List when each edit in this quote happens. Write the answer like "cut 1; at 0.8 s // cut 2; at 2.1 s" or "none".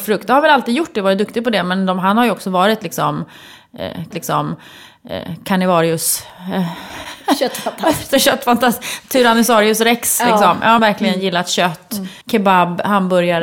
cut 1; at 4.1 s // cut 2; at 10.8 s // cut 3; at 12.2 s